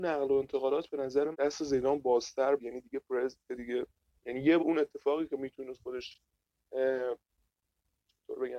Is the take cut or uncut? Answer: cut